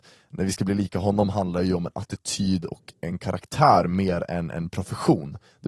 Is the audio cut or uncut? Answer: uncut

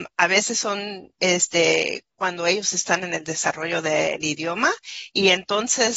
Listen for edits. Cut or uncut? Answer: uncut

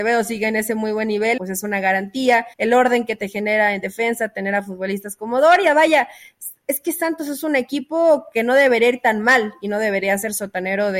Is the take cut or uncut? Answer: cut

